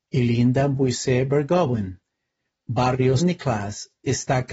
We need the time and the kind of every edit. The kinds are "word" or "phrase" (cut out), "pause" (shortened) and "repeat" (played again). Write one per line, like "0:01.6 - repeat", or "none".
0:03.2 - word

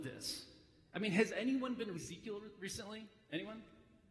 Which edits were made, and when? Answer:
0:01.9 - word

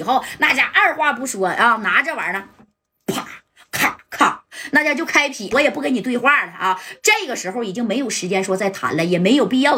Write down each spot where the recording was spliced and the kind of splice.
0:05.5 - word

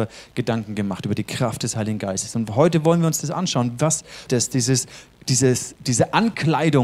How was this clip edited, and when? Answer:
0:04.3 - word

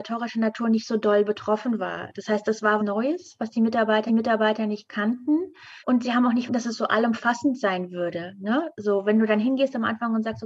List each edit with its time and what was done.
0:02.8 - word
0:04.1 - repeat
0:05.8 - pause
0:06.5 - word

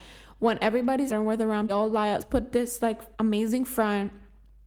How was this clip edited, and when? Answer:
0:01.1 - word
0:01.7 - phrase
0:02.2 - word
0:03.1 - pause

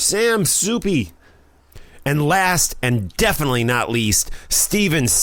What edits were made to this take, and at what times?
none

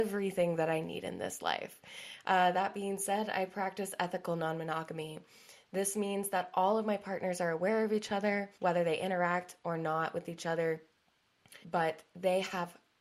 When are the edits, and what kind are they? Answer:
0:08.5 - pause
0:11.6 - pause

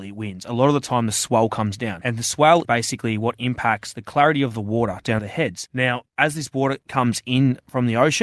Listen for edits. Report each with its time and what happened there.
0:02.6 - word
0:05.2 - phrase
0:06.8 - pause

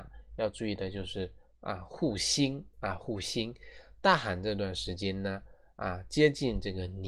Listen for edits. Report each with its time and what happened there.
0:02.7 - pause

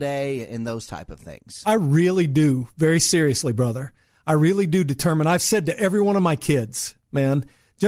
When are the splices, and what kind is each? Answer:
none

